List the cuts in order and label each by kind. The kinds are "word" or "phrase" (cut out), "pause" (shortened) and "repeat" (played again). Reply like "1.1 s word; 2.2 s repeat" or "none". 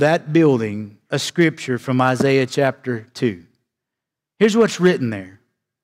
none